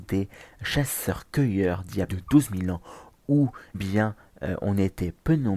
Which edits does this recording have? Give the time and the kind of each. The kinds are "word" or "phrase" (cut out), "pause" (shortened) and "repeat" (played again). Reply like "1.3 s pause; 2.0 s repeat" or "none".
2.1 s word; 3.7 s word